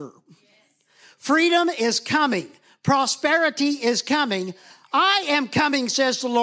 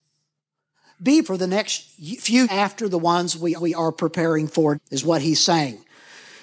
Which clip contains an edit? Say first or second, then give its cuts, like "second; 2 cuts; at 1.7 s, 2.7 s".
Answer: second; 4 cuts; at 1.2 s, 2.4 s, 3.6 s, 4.7 s